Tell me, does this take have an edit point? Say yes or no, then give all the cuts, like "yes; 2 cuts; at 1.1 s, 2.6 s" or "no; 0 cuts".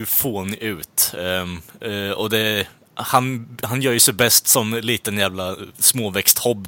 no; 0 cuts